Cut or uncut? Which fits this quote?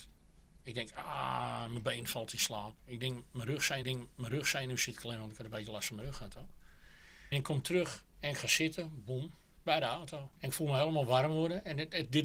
cut